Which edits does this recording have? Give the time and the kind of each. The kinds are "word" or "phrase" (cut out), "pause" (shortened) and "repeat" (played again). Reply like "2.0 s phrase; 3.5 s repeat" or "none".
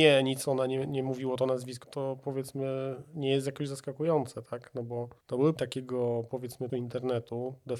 1.8 s word; 5.6 s word; 6.7 s word